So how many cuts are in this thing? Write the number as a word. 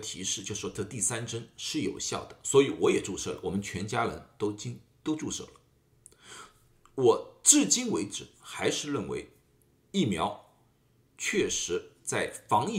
zero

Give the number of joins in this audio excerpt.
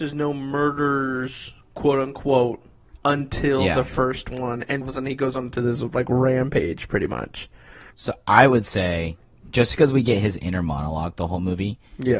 two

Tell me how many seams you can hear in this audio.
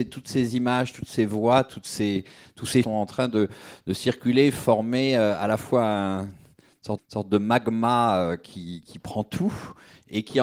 three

